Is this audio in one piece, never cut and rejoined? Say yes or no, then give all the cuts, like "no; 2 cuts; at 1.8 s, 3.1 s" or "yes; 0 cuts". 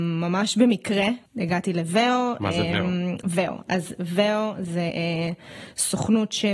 no; 1 cut; at 1.3 s